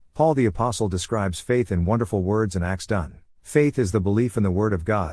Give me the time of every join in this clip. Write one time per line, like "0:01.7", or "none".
0:03.3